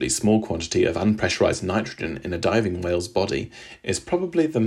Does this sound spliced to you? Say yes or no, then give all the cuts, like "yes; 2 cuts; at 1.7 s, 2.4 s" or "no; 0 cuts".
no; 0 cuts